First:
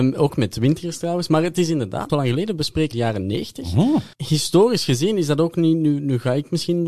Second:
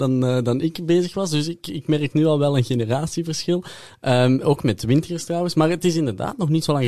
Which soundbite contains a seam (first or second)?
first